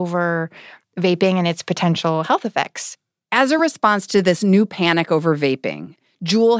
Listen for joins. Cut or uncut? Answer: uncut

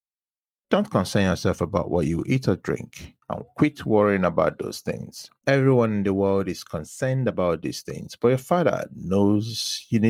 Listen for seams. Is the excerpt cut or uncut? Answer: cut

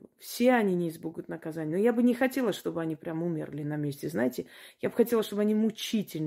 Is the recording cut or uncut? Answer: uncut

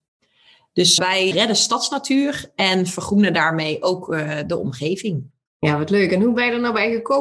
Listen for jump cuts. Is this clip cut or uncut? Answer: cut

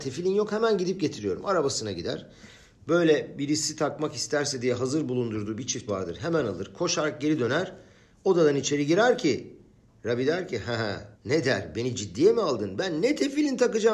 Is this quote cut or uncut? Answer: cut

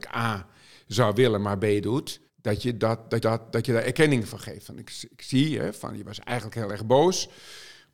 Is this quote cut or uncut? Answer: cut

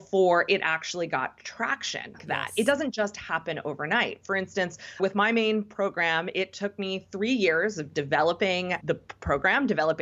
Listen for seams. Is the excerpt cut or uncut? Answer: cut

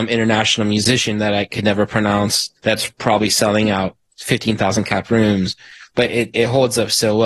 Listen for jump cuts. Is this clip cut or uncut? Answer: cut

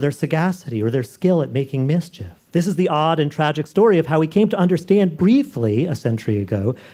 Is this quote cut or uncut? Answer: cut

